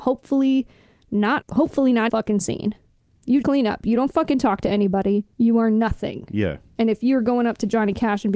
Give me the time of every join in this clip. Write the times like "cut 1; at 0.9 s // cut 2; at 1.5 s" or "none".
cut 1; at 1.4 s // cut 2; at 2.1 s // cut 3; at 3.4 s // cut 4; at 5.3 s